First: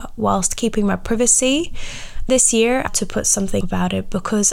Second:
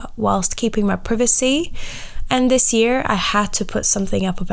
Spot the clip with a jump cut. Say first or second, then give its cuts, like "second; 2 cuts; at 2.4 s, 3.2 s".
first; 3 cuts; at 2.3 s, 2.9 s, 3.6 s